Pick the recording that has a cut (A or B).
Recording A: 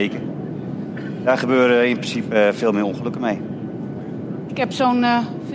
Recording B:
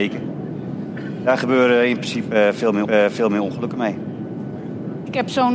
B